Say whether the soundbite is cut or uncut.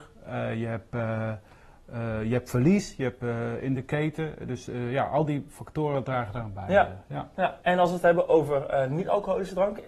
cut